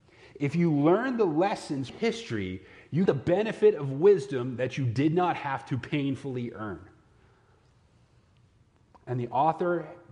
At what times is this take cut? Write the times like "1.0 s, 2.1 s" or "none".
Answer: 1.9 s, 3.1 s